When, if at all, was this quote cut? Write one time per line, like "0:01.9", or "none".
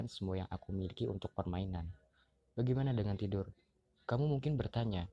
none

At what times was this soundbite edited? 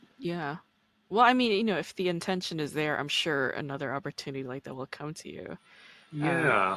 none

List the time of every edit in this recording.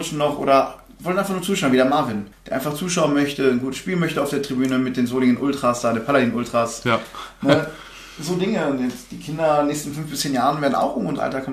0:02.3

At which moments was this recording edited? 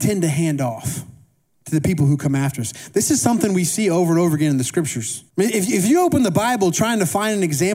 0:01.4
0:05.3

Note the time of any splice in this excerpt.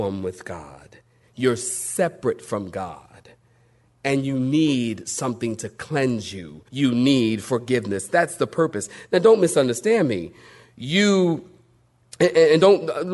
0:06.7

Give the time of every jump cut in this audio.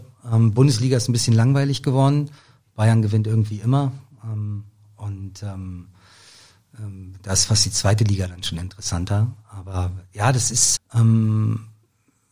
0:10.8

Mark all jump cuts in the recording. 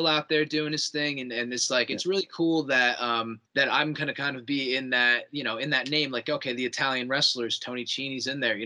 0:03.5

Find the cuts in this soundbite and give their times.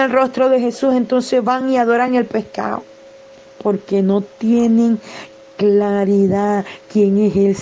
none

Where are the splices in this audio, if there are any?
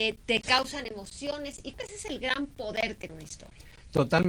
0:01.7
0:03.1

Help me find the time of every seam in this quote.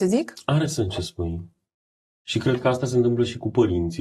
none

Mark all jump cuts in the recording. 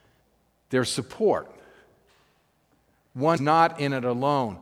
0:03.4

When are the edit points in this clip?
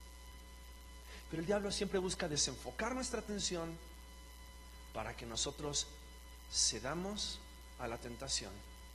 none

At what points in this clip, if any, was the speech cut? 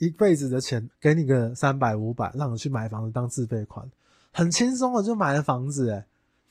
0:00.9

